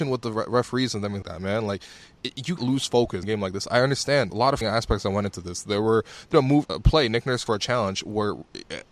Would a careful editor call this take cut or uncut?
cut